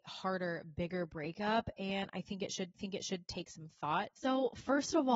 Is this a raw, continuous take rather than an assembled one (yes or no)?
no